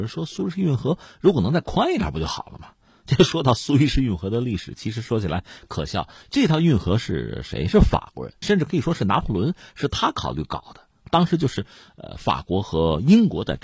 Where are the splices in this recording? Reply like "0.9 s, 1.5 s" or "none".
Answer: 8.4 s